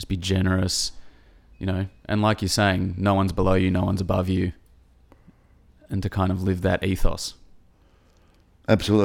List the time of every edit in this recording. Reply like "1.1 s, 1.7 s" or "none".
none